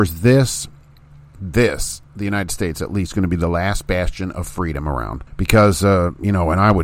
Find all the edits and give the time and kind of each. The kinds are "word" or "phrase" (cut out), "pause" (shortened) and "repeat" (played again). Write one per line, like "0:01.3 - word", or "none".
0:05.3 - pause